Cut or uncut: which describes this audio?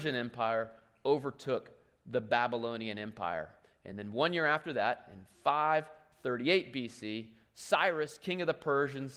uncut